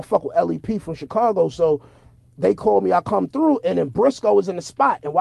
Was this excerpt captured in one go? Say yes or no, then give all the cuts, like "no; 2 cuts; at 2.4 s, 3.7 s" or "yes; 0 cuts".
yes; 0 cuts